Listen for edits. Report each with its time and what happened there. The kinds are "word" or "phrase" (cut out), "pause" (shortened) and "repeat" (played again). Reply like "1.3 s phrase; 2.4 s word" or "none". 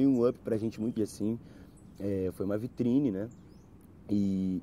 1.0 s word